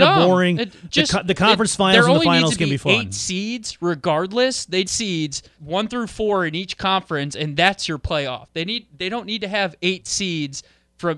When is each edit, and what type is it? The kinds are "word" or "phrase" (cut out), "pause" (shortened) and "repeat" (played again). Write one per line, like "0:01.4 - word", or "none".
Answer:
0:04.8 - phrase
0:05.5 - word